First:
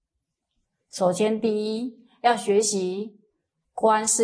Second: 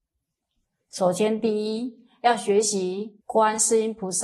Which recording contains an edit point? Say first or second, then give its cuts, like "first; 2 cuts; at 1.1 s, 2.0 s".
second; 1 cut; at 3.2 s